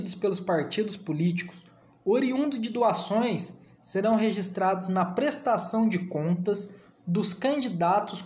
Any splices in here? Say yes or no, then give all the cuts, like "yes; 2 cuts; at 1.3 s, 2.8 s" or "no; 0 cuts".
no; 0 cuts